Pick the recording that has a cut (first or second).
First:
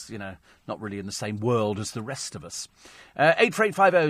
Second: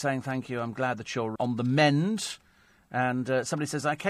second